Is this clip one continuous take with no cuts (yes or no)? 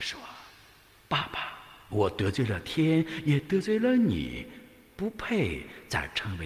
no